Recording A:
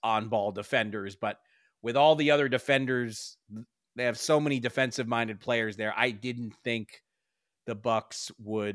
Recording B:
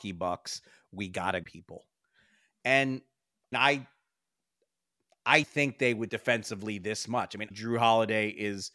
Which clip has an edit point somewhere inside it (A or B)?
B